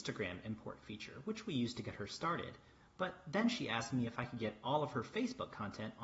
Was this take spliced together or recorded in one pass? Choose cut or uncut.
uncut